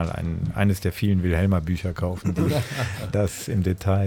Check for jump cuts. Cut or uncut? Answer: uncut